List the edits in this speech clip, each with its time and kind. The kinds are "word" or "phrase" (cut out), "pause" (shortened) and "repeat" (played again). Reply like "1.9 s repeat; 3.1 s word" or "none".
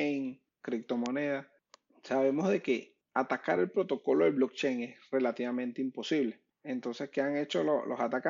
none

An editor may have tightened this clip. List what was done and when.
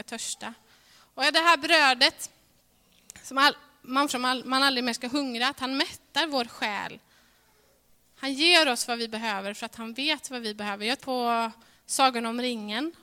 4.1 s word; 11.0 s word

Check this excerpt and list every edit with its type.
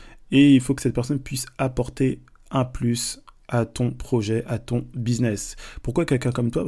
none

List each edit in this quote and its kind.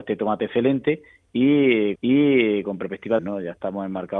1.9 s repeat; 3.2 s phrase

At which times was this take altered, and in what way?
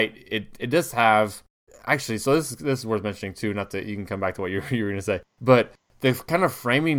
none

